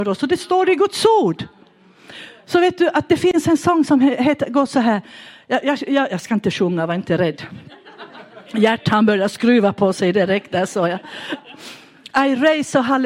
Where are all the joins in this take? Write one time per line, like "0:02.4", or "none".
none